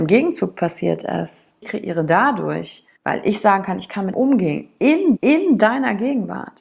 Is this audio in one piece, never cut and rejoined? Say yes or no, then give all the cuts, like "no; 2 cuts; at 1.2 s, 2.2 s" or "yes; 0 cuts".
no; 4 cuts; at 1.6 s, 3.0 s, 4.1 s, 5.2 s